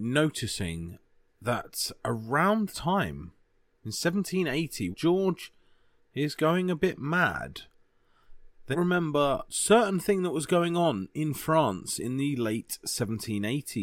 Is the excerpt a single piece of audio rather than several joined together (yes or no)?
no